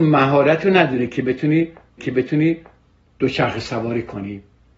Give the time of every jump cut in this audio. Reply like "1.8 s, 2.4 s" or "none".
2.0 s